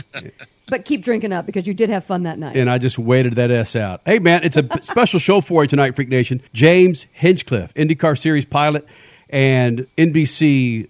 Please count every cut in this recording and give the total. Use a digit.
2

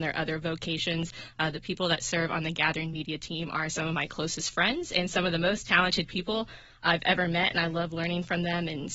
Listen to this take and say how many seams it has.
0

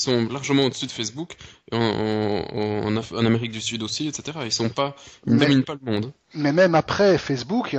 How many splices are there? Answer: 0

